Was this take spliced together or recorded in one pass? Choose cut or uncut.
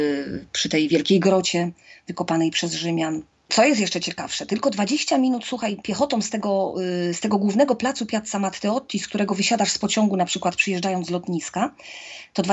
uncut